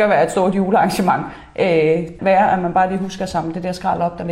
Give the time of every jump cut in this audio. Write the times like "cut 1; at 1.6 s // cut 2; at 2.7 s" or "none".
cut 1; at 2.2 s